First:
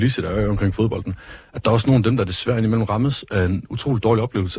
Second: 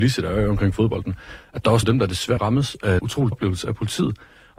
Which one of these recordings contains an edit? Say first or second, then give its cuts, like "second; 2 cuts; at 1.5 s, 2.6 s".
second; 4 cuts; at 1.8 s, 2.4 s, 3.0 s, 3.3 s